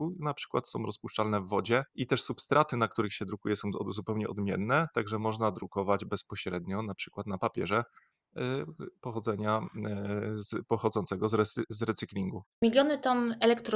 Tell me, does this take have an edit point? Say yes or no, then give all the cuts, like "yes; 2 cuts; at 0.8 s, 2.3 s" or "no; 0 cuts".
yes; 2 cuts; at 1.9 s, 12.5 s